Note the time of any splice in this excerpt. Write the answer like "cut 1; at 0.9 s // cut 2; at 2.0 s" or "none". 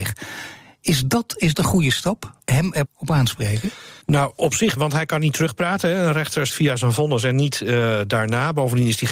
cut 1; at 1.5 s // cut 2; at 2.4 s // cut 3; at 2.9 s // cut 4; at 4.0 s // cut 5; at 4.8 s // cut 6; at 6.5 s